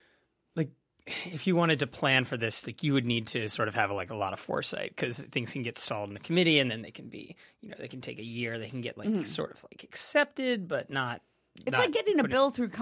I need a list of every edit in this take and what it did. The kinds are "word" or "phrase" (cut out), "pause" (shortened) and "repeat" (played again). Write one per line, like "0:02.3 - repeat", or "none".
none